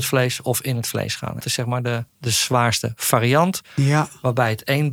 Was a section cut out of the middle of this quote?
yes; 2 cuts; at 1.4 s, 2.1 s

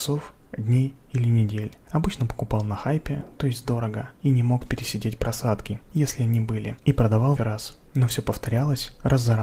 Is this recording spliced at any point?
yes; 2 cuts; at 4.2 s, 7.4 s

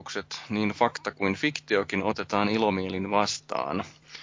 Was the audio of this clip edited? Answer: no; 0 cuts

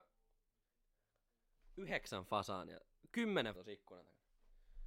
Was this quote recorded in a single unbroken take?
no; 1 cut; at 3.5 s

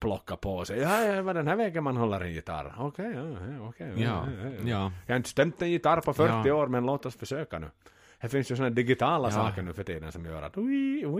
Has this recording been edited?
no; 0 cuts

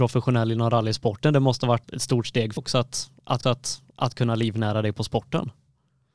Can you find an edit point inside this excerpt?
yes; 3 cuts; at 1.8 s, 2.6 s, 3.4 s

